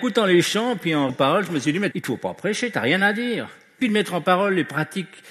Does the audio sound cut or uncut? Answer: cut